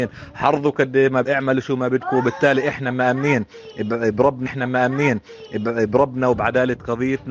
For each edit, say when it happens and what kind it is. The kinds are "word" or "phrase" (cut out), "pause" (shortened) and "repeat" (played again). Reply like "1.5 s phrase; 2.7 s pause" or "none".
1.2 s word; 4.5 s repeat